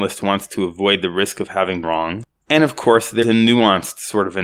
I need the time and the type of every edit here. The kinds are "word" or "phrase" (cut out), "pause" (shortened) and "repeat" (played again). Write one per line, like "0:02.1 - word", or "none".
0:01.8 - word
0:03.2 - word